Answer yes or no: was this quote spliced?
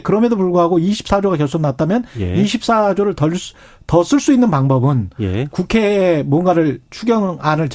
no